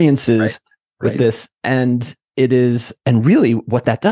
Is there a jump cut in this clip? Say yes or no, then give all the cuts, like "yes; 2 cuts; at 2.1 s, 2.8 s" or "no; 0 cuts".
yes; 1 cut; at 2.2 s